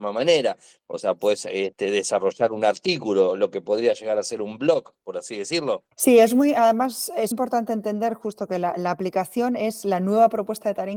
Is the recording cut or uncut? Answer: cut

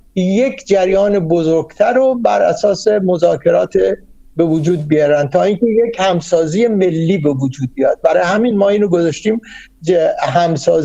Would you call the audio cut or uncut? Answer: uncut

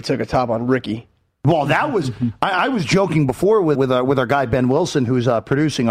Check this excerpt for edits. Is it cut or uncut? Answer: cut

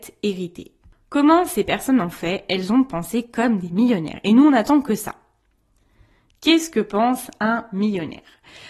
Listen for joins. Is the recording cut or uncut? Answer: uncut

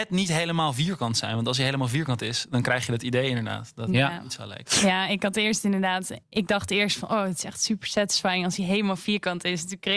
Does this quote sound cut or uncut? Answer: cut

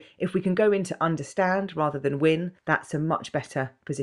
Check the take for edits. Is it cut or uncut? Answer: cut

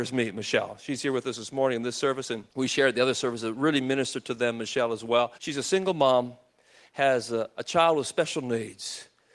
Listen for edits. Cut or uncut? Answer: cut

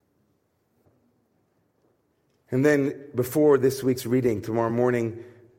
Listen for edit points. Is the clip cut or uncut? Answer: uncut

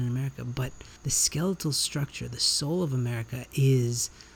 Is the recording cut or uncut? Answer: cut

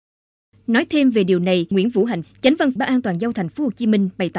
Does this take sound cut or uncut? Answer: cut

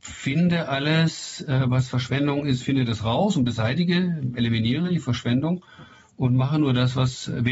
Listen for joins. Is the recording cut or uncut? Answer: uncut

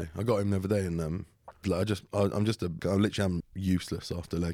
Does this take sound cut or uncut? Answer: cut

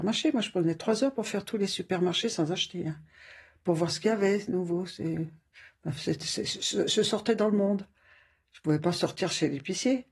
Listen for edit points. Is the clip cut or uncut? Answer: uncut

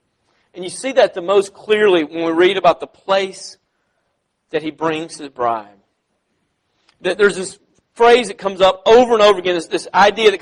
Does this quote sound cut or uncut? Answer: uncut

